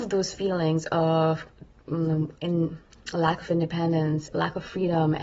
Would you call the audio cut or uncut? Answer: cut